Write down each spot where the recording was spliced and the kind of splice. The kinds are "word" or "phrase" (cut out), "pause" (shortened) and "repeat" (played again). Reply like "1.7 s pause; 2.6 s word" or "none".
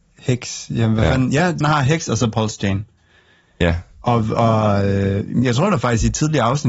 1.6 s word; 5.4 s word